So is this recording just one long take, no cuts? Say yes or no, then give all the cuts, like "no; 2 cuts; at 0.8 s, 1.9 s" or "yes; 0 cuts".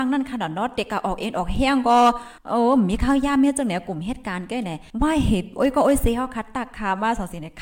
no; 2 cuts; at 2.4 s, 4.9 s